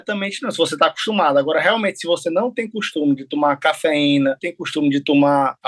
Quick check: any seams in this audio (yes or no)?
yes